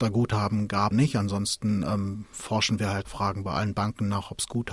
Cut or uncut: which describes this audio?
cut